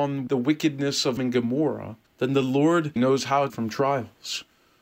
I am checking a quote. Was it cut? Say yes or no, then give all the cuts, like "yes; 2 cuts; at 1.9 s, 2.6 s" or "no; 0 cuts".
yes; 4 cuts; at 1.2 s, 2.1 s, 3.0 s, 3.5 s